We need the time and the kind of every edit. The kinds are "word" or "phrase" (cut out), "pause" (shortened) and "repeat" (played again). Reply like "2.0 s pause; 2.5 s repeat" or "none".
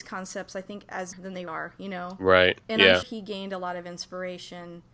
1.1 s word; 1.5 s word; 3.0 s word